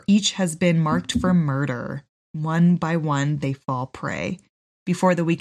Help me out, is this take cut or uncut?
uncut